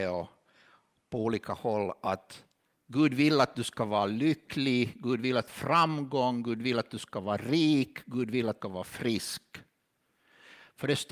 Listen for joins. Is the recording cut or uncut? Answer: cut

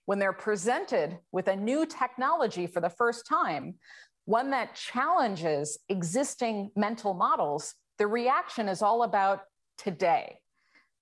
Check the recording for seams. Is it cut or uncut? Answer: uncut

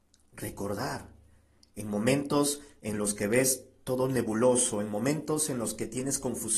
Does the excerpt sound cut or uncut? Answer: uncut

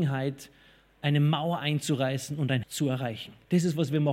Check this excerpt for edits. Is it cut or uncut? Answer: cut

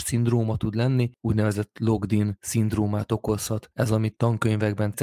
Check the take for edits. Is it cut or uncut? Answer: cut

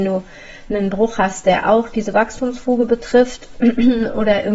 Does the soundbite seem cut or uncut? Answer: uncut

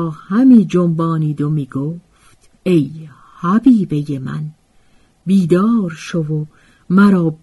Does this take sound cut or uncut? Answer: cut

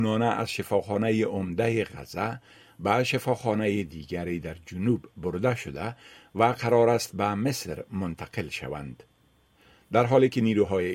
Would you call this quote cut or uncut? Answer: uncut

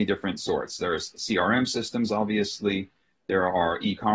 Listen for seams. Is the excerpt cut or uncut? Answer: uncut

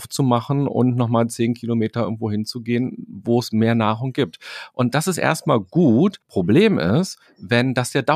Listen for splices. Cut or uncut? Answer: cut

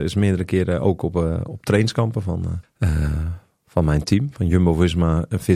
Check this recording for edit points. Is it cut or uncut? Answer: cut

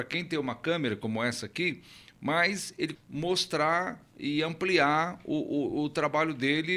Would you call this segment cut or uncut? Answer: cut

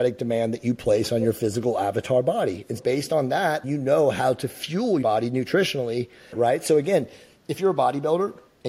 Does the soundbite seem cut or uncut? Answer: cut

